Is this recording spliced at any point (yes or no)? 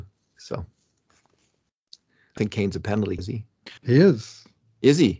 yes